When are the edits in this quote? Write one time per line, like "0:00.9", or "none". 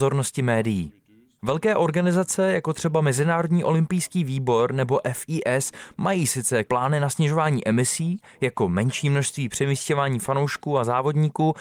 0:06.6